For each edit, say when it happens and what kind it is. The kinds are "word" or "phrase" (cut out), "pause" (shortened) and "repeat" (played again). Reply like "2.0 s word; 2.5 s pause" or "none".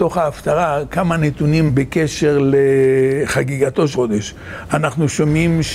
1.7 s word; 3.9 s word